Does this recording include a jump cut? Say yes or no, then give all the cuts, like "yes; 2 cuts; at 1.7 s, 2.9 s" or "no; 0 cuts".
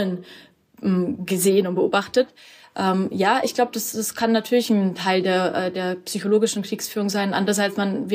no; 0 cuts